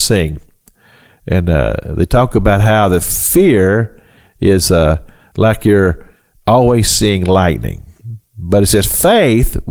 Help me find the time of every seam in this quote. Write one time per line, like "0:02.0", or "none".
none